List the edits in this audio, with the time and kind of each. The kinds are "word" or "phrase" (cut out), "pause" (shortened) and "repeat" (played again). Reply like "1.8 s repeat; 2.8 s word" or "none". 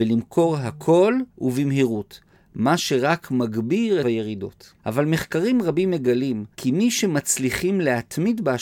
1.3 s pause; 4.0 s phrase; 4.8 s pause; 6.5 s pause